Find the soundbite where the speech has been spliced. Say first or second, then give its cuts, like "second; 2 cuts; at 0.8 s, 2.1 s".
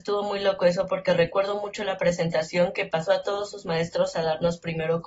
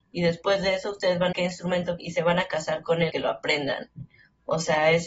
second; 3 cuts; at 1.3 s, 2.0 s, 3.1 s